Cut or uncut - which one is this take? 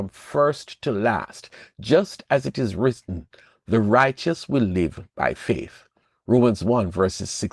uncut